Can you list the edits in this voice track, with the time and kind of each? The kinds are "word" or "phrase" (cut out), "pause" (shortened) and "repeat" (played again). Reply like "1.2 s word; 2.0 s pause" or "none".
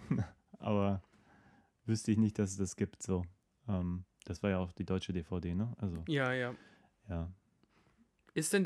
none